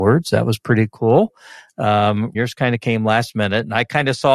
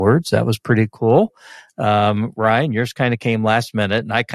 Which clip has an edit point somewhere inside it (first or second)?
first